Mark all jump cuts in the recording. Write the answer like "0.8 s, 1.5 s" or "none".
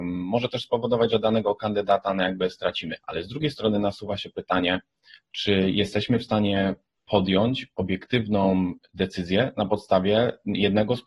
3.0 s

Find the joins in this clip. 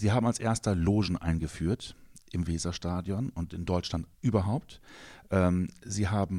4.1 s

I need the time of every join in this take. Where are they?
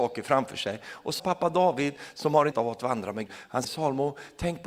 1.2 s, 2.5 s, 3.3 s, 3.6 s

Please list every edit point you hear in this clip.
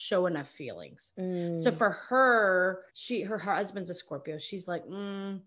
2.9 s

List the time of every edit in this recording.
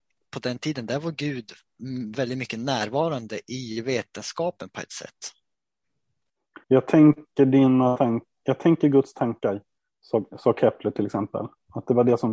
6.6 s

